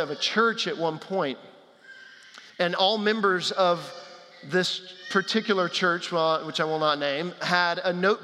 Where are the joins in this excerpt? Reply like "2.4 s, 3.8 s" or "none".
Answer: 2.5 s